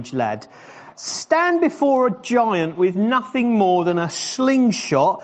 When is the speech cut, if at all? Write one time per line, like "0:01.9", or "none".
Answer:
0:00.9